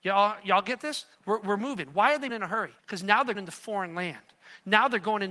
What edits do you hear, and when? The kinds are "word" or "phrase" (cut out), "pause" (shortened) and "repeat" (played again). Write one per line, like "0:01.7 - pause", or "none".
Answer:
0:01.1 - pause
0:02.3 - word
0:02.8 - pause
0:03.3 - word